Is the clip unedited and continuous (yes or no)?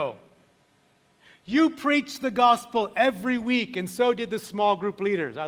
yes